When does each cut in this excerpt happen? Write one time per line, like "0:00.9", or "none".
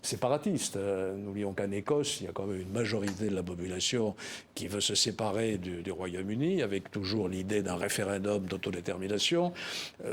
0:01.6
0:05.8